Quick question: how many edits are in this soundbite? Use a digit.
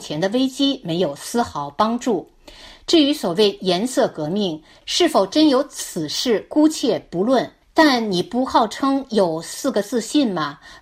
1